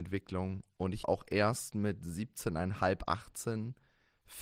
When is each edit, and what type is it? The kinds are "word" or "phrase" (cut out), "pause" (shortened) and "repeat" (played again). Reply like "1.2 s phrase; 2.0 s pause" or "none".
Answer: 1.0 s word